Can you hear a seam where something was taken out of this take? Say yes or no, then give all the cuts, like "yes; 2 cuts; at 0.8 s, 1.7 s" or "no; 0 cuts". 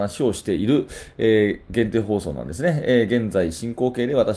no; 0 cuts